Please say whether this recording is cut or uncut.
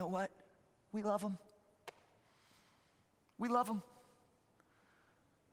uncut